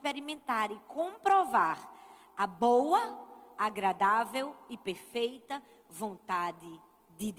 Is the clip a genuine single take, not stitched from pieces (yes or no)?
yes